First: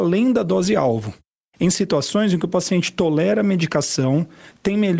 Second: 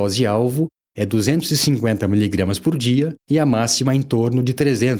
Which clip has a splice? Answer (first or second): second